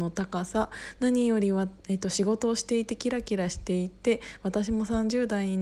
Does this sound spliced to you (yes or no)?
yes